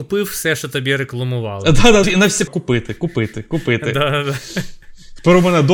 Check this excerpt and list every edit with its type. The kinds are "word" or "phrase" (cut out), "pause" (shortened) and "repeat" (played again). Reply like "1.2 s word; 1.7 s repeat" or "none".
2.0 s word; 2.5 s phrase